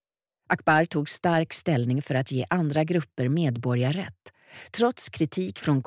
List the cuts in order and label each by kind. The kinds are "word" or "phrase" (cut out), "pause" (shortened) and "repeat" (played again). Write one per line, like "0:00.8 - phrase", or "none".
none